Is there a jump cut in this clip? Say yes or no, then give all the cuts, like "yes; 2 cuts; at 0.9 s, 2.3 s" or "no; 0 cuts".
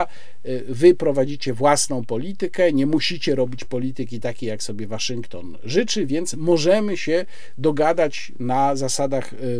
no; 0 cuts